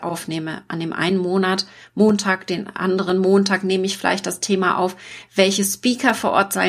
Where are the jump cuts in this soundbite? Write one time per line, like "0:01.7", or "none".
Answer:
none